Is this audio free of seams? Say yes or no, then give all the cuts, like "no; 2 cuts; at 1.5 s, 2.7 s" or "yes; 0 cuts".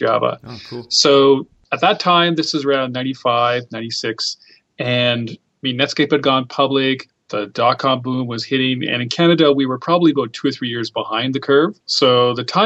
yes; 0 cuts